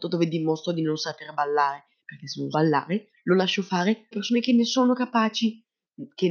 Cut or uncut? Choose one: cut